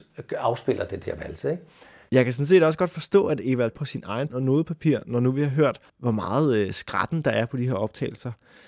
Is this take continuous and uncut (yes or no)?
no